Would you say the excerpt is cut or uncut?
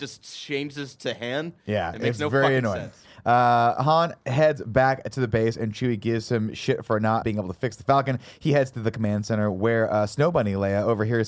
cut